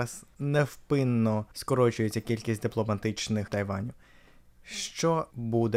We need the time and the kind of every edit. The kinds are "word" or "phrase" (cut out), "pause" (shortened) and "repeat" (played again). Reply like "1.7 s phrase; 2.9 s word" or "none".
3.5 s word